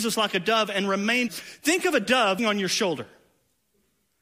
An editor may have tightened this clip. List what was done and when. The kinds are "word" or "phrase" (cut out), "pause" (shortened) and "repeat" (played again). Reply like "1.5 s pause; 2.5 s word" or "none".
1.3 s phrase; 2.4 s word